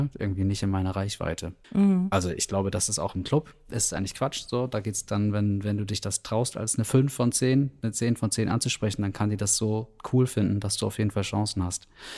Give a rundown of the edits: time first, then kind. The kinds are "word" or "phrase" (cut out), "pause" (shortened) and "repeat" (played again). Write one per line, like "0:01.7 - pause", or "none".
0:01.6 - pause